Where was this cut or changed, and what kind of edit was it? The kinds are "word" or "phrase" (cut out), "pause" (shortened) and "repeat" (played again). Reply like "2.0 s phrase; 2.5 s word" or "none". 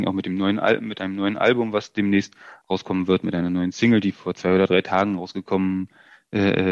none